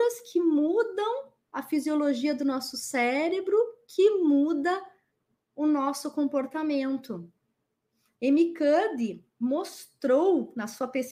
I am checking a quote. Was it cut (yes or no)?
no